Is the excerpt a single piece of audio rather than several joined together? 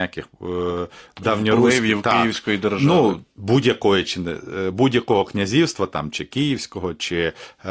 no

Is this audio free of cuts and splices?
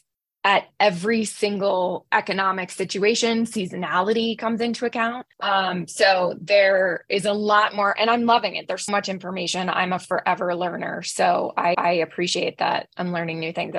no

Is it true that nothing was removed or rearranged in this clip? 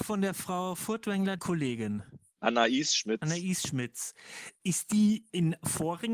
no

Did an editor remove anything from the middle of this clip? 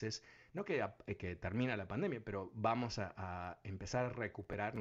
no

